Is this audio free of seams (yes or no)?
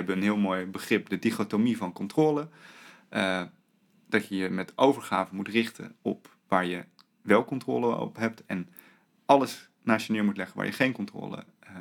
yes